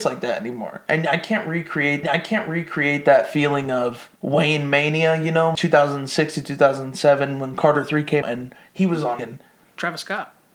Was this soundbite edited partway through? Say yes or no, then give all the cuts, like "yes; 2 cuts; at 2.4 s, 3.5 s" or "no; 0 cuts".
yes; 5 cuts; at 2.0 s, 4.2 s, 5.5 s, 8.2 s, 9.2 s